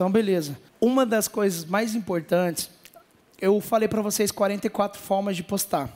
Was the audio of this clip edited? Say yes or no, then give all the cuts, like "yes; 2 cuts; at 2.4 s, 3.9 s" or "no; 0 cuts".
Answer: no; 0 cuts